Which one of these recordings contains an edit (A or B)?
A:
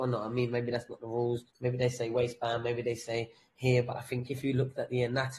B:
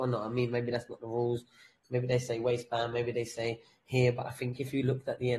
A